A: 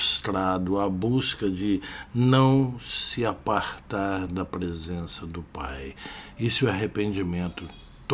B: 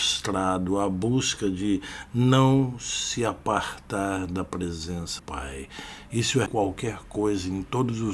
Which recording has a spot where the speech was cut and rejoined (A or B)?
B